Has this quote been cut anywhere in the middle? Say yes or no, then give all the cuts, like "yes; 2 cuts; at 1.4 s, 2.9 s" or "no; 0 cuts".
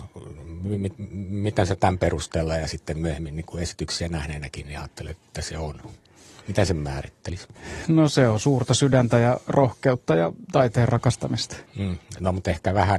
yes; 1 cut; at 11.7 s